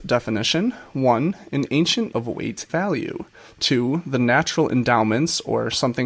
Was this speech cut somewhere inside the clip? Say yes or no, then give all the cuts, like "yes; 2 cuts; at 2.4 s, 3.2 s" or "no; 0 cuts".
yes; 2 cuts; at 2.1 s, 2.7 s